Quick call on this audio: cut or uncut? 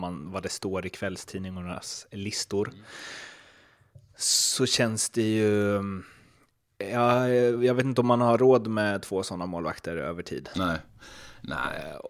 uncut